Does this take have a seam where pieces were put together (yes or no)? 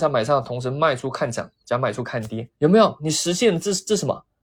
yes